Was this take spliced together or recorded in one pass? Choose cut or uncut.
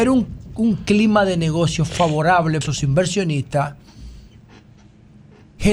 cut